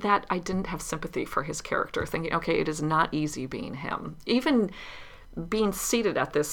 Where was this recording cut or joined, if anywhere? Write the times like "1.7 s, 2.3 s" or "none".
none